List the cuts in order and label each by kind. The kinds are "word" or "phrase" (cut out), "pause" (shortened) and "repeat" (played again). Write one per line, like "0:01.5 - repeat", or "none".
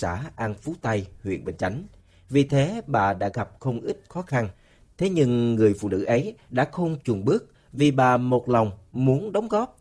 none